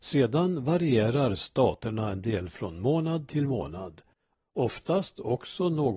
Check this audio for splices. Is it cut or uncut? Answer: uncut